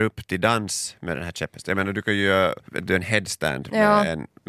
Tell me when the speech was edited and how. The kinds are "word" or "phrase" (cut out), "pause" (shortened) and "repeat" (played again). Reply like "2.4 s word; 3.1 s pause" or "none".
2.7 s pause